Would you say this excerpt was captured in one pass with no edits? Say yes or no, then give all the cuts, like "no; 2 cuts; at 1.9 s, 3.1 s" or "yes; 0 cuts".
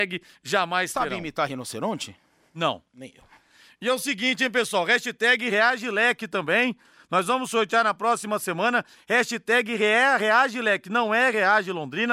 yes; 0 cuts